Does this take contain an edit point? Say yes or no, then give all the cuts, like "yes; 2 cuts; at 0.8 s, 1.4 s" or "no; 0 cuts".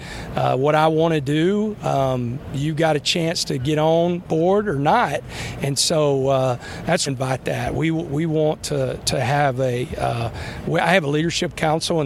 yes; 1 cut; at 7.1 s